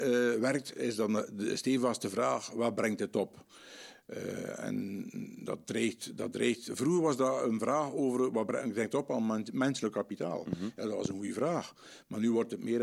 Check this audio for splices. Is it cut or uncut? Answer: uncut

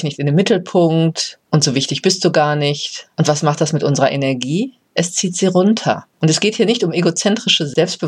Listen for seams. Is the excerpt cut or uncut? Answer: cut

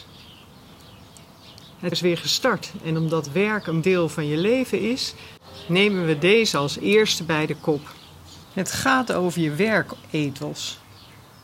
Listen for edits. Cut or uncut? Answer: cut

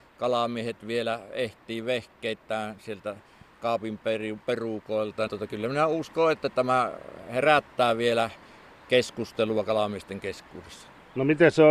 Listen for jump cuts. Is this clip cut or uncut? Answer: cut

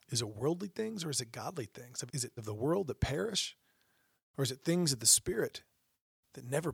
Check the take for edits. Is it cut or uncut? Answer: cut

